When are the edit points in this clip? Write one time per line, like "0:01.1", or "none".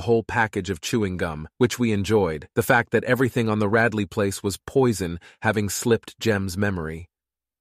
0:01.5
0:02.5